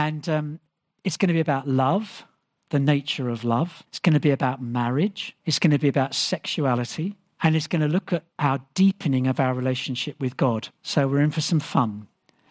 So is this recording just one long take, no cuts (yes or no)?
no